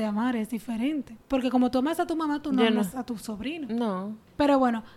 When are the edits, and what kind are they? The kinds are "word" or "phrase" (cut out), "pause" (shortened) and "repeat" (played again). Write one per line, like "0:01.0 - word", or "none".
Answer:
0:01.2 - pause